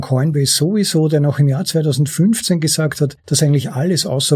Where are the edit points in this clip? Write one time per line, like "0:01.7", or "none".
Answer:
0:03.2